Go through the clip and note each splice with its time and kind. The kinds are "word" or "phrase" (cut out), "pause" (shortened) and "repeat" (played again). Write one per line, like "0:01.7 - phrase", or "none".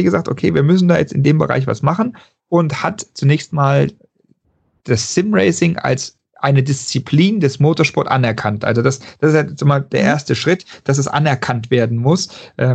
none